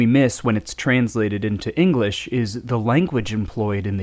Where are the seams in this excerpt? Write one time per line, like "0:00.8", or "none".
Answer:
none